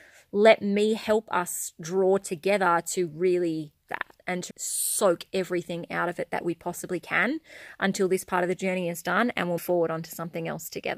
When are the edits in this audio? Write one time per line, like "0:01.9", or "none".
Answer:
0:03.9
0:04.5
0:09.6